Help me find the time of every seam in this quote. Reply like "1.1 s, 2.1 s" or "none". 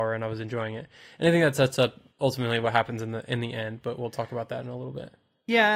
2.1 s